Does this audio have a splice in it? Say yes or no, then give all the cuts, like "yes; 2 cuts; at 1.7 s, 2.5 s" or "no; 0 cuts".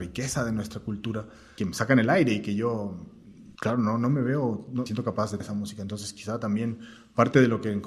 yes; 4 cuts; at 1.6 s, 3.6 s, 4.9 s, 5.4 s